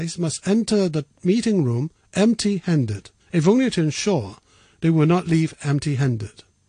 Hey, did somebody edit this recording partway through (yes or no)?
yes